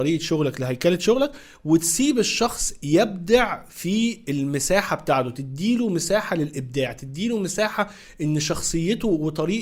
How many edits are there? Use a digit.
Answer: 0